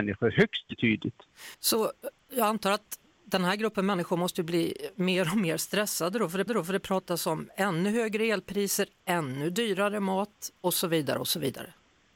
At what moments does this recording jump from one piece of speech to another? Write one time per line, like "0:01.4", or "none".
0:01.5
0:06.5